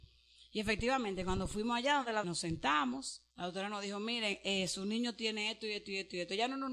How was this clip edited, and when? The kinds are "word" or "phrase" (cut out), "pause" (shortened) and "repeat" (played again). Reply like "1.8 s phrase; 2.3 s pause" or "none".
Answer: 2.2 s phrase; 3.3 s pause